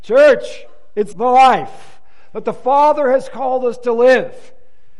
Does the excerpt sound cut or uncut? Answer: cut